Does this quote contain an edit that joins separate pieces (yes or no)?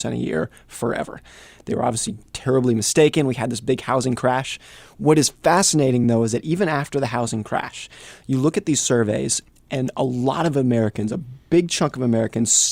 no